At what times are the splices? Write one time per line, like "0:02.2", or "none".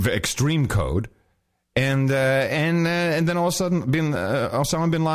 none